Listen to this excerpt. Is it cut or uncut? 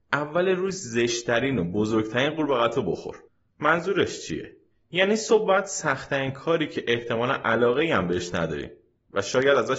cut